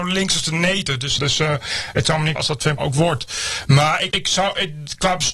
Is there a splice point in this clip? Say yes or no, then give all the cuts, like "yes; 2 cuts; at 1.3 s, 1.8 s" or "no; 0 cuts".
yes; 4 cuts; at 1.2 s, 2.4 s, 2.8 s, 4.1 s